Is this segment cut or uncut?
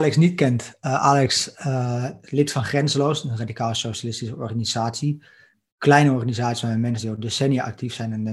uncut